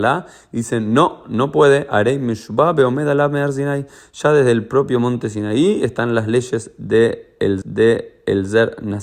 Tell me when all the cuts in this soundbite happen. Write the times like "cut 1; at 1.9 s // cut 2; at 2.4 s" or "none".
cut 1; at 7.6 s